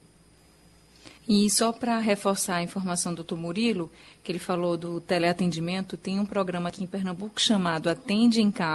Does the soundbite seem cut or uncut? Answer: cut